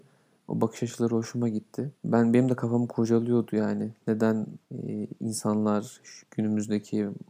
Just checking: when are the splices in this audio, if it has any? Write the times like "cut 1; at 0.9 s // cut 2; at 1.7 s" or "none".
cut 1; at 2.0 s // cut 2; at 4.6 s // cut 3; at 6.2 s